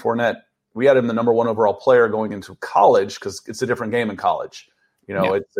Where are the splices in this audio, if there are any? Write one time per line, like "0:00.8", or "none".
none